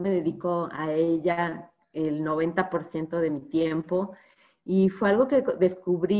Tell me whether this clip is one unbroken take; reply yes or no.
yes